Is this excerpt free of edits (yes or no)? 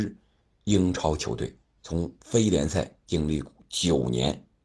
no